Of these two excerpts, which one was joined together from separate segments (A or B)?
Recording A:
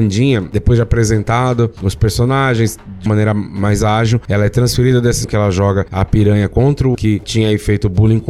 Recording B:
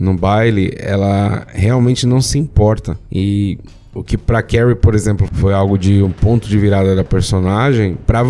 A